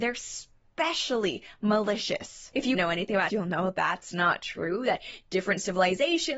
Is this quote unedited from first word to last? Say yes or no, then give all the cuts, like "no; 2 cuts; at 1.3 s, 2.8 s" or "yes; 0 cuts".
no; 2 cuts; at 2.7 s, 3.3 s